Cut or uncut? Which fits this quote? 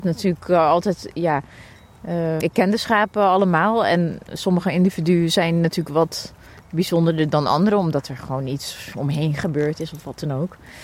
cut